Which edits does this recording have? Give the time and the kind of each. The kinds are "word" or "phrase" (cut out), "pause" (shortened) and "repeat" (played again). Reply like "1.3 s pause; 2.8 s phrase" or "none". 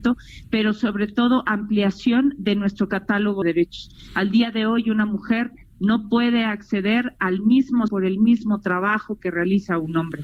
3.4 s word; 7.9 s word